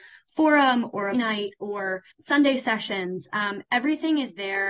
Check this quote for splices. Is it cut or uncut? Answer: cut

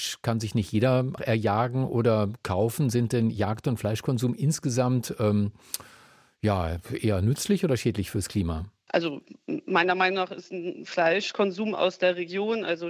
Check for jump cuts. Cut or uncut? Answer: cut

